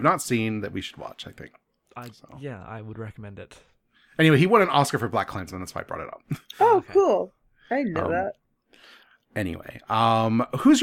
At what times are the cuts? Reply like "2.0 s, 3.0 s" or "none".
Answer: none